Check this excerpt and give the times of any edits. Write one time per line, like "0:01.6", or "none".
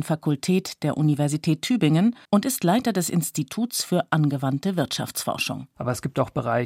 0:02.2